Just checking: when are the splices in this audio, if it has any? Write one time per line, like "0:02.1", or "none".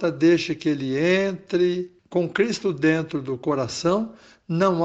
0:02.0